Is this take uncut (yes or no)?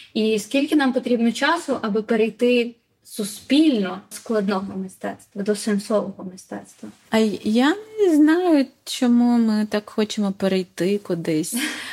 no